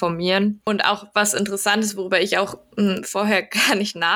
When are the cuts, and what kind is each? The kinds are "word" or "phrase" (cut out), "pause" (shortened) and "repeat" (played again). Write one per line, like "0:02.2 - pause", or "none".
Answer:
none